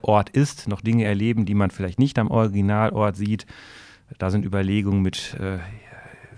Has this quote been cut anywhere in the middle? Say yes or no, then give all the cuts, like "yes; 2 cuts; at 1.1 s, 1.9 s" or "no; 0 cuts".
no; 0 cuts